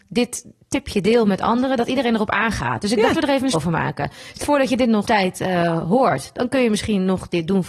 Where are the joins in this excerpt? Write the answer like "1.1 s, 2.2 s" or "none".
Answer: 3.1 s, 3.5 s, 4.4 s, 5.0 s